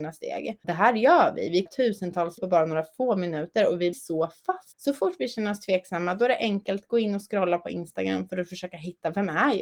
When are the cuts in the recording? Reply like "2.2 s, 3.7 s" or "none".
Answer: 1.7 s, 2.4 s, 3.9 s